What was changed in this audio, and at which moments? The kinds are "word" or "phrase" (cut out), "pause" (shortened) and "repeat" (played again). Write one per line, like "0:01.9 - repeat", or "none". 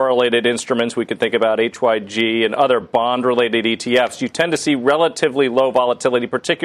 none